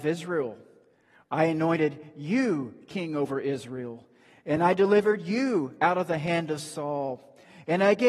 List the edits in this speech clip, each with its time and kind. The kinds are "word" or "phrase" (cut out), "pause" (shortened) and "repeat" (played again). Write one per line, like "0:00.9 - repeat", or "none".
none